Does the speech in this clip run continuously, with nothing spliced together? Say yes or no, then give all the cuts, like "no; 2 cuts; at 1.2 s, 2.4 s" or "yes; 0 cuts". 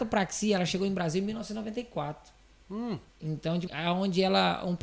no; 2 cuts; at 3.1 s, 3.7 s